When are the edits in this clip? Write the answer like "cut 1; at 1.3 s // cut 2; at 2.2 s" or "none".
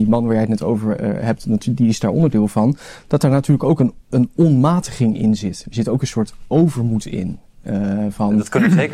none